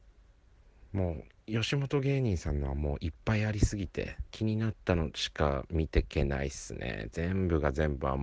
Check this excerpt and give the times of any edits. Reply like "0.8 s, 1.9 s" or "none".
4.3 s